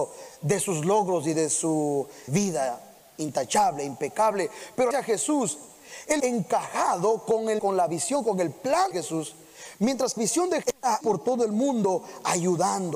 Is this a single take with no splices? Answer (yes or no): no